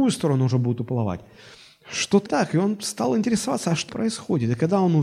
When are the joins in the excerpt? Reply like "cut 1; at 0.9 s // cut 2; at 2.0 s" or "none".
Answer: cut 1; at 2.3 s // cut 2; at 3.9 s